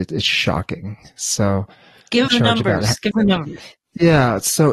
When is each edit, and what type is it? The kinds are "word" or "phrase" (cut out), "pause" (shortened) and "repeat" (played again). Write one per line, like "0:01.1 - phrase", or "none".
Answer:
0:02.3 - word
0:03.1 - word